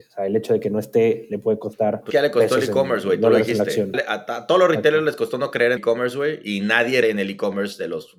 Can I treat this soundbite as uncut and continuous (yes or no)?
no